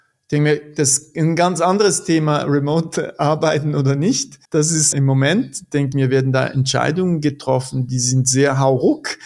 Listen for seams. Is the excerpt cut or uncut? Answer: cut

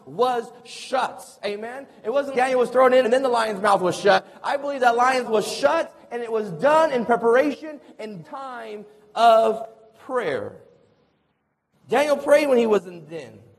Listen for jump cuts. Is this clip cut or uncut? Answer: cut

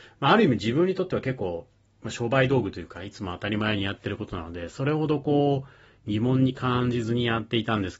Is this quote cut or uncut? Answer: uncut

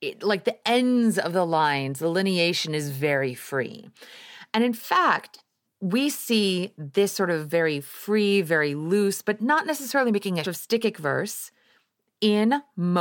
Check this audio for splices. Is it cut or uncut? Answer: cut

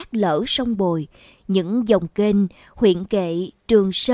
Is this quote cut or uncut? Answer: uncut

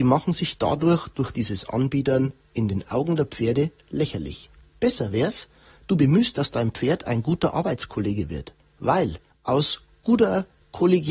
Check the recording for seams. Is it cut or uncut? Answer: cut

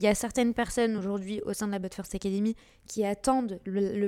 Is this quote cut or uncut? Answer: uncut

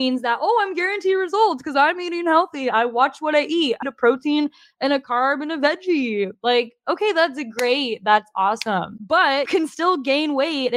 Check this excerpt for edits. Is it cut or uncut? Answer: cut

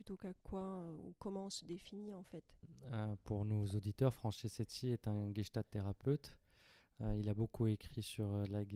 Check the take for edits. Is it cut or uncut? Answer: uncut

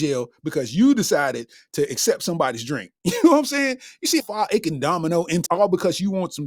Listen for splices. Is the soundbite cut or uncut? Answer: cut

